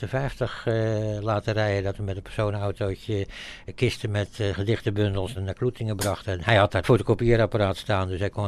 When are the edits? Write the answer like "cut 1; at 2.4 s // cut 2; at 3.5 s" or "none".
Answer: cut 1; at 5.4 s // cut 2; at 6.8 s